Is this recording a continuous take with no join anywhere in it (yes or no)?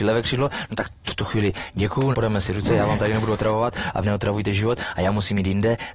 no